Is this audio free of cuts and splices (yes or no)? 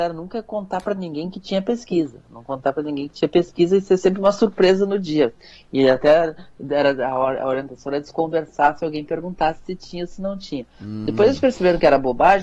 yes